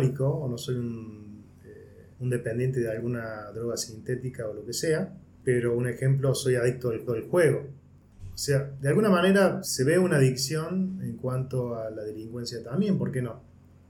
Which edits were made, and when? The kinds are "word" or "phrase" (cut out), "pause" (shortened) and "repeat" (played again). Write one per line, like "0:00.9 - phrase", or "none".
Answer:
0:02.1 - pause
0:07.1 - repeat
0:09.6 - word